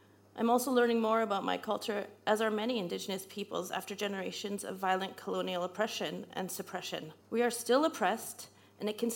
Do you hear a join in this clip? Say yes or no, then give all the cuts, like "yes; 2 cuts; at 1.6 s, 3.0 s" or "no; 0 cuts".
yes; 1 cut; at 7.2 s